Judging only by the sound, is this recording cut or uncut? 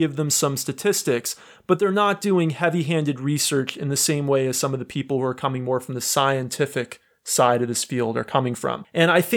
uncut